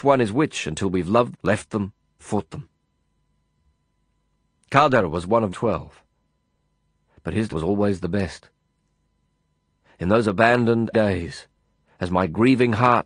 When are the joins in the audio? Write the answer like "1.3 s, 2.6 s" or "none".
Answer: 1.3 s, 2.2 s, 5.5 s, 7.5 s, 10.9 s